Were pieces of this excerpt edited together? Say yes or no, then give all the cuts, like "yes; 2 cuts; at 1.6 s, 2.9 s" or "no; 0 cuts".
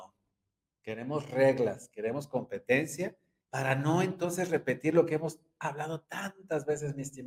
yes; 1 cut; at 3.4 s